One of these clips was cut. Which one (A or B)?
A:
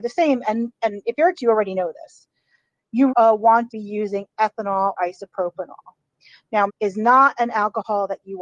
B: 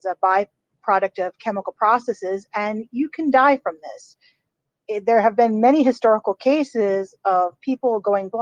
A